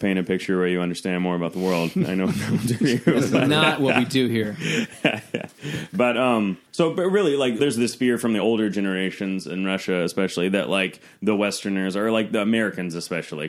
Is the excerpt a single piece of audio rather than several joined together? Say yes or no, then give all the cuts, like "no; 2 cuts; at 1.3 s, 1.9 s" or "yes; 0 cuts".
no; 2 cuts; at 6.7 s, 7.6 s